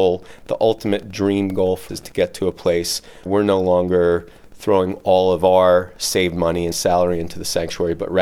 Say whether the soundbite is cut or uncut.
cut